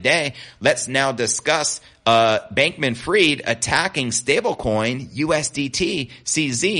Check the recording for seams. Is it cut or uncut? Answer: uncut